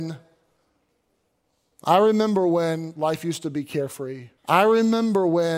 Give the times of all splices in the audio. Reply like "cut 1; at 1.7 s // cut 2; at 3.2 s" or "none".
cut 1; at 4.4 s